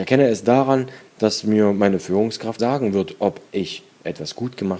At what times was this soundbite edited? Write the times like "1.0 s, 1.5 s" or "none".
2.6 s, 3.5 s